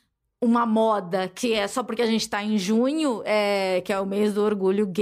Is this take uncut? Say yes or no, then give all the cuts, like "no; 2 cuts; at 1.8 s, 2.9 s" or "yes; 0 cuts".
yes; 0 cuts